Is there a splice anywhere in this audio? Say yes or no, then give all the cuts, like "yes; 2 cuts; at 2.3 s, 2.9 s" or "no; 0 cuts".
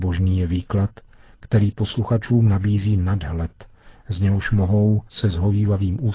yes; 1 cut; at 5.1 s